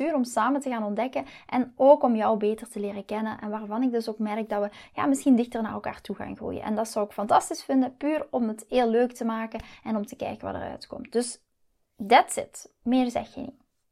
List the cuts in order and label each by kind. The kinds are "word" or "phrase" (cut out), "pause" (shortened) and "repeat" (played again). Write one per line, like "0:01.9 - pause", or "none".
none

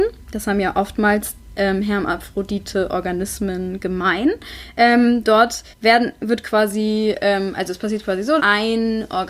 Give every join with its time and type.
0:05.7 - pause
0:08.4 - word

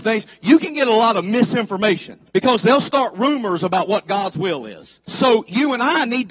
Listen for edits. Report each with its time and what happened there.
0:02.3 - pause
0:05.0 - pause

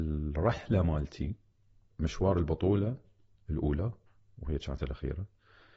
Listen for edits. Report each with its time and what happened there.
0:01.9 - word
0:04.1 - pause

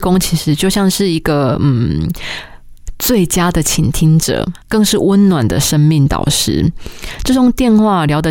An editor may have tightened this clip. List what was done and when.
0:04.6 - pause

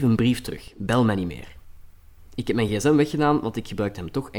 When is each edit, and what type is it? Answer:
none

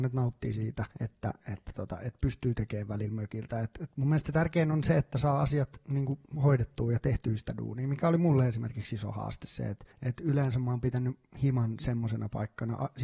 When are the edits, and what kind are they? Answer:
0:00.9 - pause
0:06.3 - pause
0:09.9 - pause

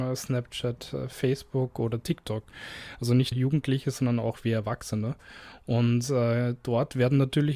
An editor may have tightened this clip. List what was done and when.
0:03.3 - word

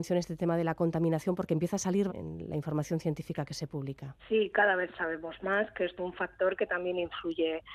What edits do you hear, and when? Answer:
0:02.1 - phrase
0:04.2 - pause
0:06.0 - word

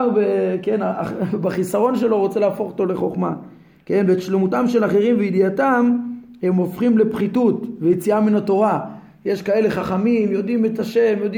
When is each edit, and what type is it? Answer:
none

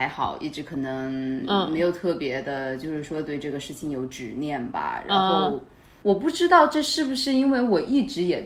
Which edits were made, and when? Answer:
0:06.0 - word

